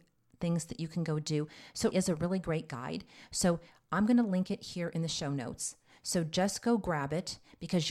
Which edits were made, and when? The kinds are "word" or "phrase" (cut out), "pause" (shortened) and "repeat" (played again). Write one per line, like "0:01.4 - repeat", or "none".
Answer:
0:01.9 - word